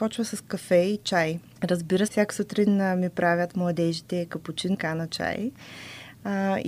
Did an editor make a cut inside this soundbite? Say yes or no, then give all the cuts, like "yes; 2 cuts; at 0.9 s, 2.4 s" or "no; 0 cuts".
yes; 2 cuts; at 2.1 s, 4.7 s